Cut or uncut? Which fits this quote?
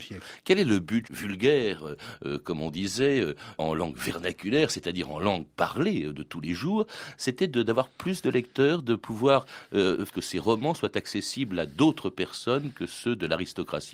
cut